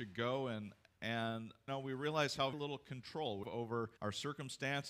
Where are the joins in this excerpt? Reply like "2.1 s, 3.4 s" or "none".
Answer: 1.7 s, 2.5 s, 3.4 s, 4.0 s